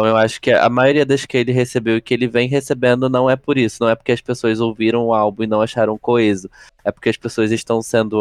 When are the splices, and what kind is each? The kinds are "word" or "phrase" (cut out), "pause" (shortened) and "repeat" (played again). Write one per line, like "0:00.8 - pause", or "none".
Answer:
0:01.3 - word